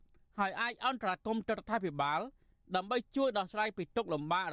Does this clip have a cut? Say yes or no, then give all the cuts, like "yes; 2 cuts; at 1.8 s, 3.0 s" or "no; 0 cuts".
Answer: no; 0 cuts